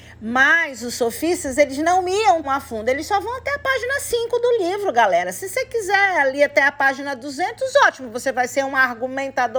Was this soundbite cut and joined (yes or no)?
yes